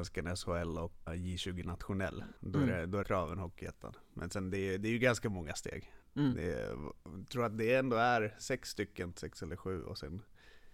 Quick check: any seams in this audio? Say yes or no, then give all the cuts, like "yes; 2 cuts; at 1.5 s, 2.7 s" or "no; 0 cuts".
yes; 5 cuts; at 1.1 s, 2.4 s, 3.0 s, 6.0 s, 9.1 s